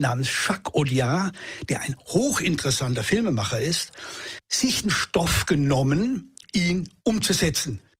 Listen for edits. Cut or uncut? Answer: cut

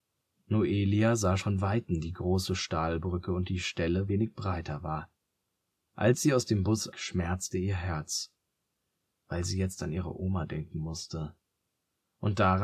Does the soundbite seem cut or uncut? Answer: cut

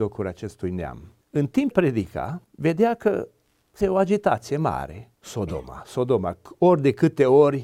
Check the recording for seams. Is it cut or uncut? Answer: cut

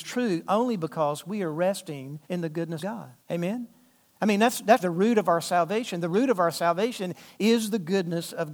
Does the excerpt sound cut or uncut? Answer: cut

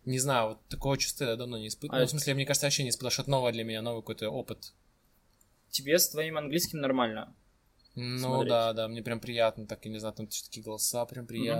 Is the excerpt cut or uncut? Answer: uncut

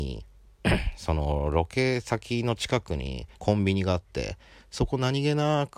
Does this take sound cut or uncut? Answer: cut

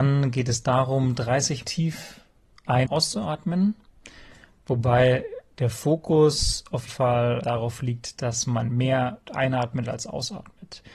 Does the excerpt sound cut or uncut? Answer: cut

